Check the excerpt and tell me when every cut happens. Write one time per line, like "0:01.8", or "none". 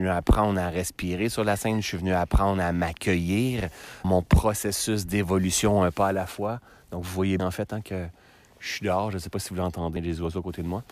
0:04.0
0:07.4
0:10.0